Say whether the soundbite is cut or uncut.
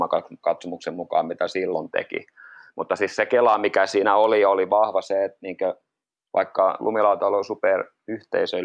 uncut